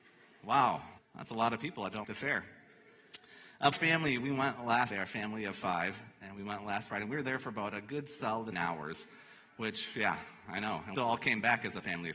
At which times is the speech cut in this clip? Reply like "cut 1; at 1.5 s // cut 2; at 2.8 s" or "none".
cut 1; at 1.0 s // cut 2; at 2.0 s // cut 3; at 3.7 s // cut 4; at 4.9 s // cut 5; at 8.5 s // cut 6; at 11.0 s

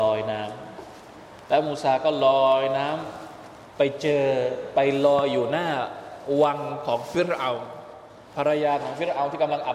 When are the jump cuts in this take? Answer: cut 1; at 8.3 s

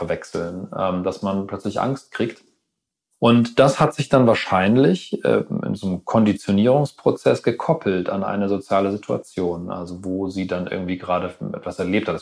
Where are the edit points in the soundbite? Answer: none

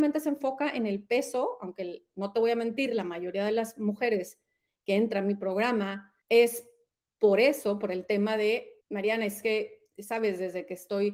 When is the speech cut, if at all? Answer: cut 1; at 6.2 s // cut 2; at 8.8 s

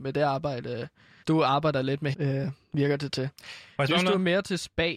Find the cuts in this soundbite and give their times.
cut 1; at 1.2 s // cut 2; at 2.1 s

